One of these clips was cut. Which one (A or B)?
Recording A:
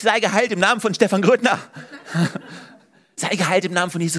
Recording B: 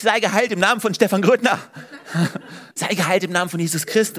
B